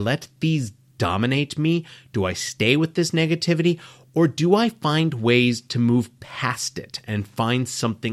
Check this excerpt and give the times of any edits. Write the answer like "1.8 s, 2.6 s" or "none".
none